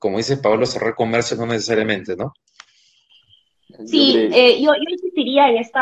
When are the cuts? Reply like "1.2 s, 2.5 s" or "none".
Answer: none